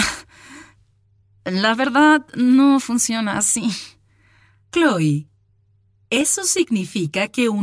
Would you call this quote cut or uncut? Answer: uncut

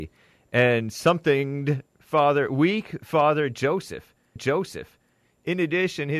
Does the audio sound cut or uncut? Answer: cut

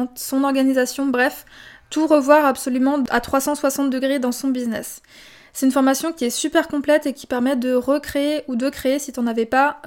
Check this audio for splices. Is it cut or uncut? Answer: uncut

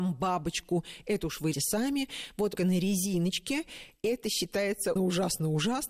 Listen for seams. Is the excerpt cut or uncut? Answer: cut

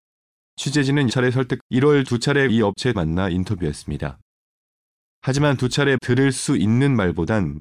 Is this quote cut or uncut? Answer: cut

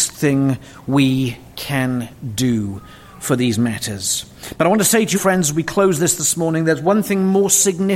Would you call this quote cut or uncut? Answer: cut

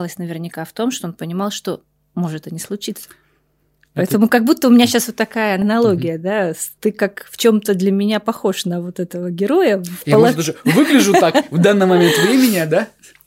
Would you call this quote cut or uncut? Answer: cut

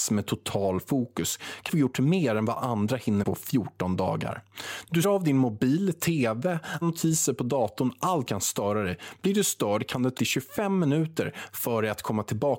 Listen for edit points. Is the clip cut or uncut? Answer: cut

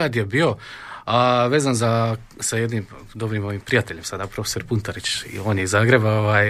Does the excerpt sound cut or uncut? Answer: uncut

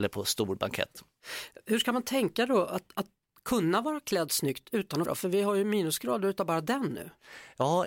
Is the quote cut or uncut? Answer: cut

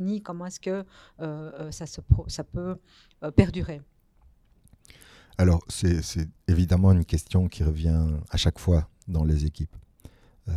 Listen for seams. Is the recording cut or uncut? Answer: uncut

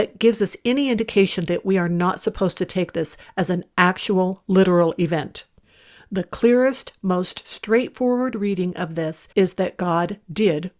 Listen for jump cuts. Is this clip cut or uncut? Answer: cut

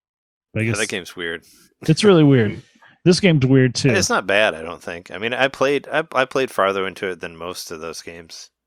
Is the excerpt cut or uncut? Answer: uncut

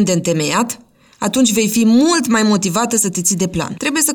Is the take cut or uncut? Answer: uncut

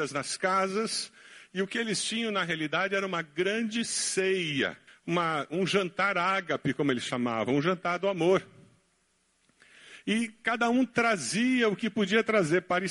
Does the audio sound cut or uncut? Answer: cut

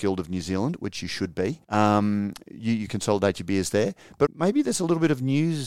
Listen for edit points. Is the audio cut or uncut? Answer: cut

